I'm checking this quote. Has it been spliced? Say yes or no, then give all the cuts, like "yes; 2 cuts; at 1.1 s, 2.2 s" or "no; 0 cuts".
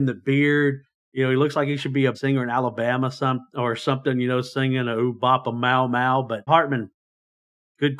yes; 2 cuts; at 2.1 s, 6.5 s